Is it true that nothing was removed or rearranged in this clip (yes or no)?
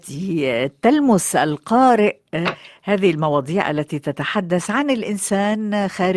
yes